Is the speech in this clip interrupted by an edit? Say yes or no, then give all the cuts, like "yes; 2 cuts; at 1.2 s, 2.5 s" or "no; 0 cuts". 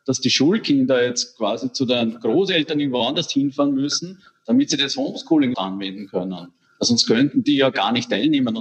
yes; 1 cut; at 5.5 s